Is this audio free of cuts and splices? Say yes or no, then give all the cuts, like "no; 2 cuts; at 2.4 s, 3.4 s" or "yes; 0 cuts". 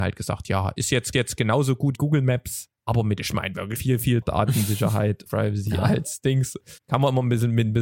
no; 8 cuts; at 1.1 s, 1.9 s, 2.7 s, 3.2 s, 3.8 s, 4.2 s, 5.3 s, 6.8 s